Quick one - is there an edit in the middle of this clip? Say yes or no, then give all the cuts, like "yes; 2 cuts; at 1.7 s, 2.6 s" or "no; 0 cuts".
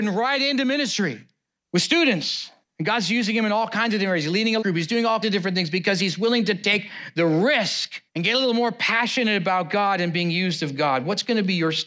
yes; 5 cuts; at 1.6 s, 2.6 s, 4.6 s, 5.2 s, 8.1 s